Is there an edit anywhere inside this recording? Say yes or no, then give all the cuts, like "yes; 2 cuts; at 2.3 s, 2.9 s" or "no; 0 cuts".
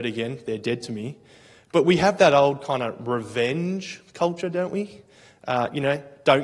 no; 0 cuts